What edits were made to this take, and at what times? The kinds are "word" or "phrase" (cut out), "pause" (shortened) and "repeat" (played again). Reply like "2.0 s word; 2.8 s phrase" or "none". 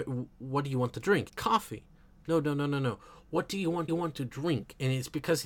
1.3 s phrase; 3.9 s repeat